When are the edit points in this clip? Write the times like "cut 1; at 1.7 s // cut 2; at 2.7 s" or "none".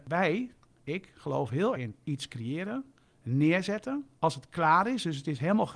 cut 1; at 1.7 s // cut 2; at 4.1 s

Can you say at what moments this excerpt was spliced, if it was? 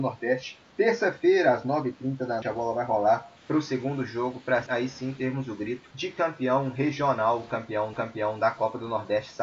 cut 1; at 2.4 s // cut 2; at 3.4 s // cut 3; at 4.7 s // cut 4; at 5.9 s // cut 5; at 7.9 s

